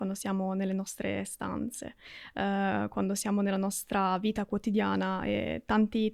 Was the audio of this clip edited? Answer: no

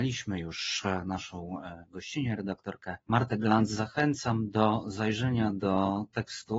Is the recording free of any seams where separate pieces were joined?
no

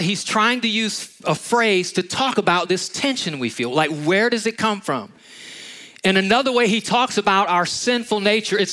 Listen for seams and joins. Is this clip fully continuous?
yes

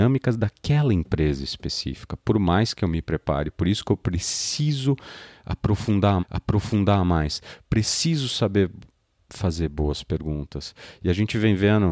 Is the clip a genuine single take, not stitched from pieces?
no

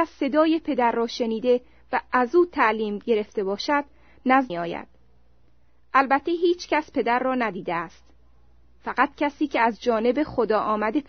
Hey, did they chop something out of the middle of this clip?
yes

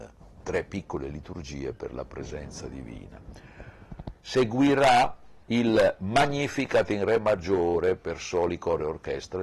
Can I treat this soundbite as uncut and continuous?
no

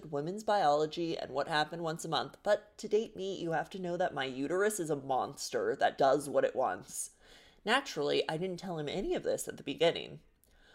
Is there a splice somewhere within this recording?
yes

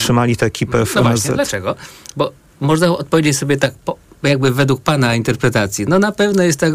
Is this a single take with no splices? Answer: yes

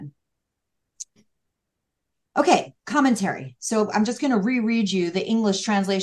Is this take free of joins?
no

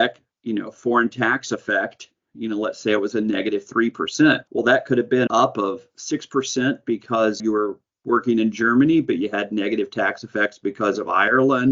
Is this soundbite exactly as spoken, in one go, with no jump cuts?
no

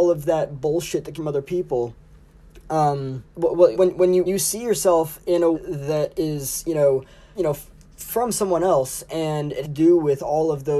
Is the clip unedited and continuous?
no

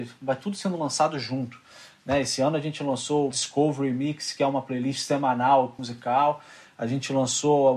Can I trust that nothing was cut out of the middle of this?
no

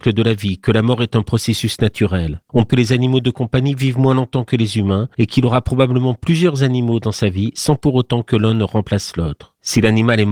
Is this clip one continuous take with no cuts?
no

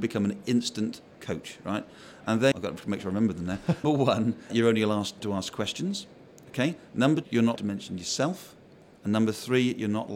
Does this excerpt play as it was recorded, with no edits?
no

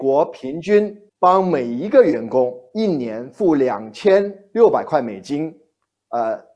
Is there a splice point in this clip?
yes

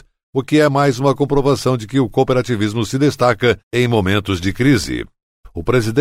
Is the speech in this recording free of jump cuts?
no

